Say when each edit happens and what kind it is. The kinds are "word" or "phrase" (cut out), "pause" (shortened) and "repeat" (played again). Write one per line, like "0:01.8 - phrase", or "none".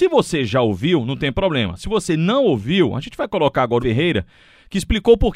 0:03.8 - phrase